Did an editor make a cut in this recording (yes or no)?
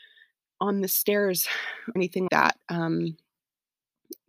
yes